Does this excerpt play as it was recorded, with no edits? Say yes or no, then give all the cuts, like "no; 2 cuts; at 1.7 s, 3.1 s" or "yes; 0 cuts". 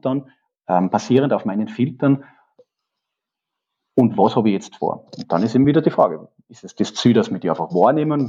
yes; 0 cuts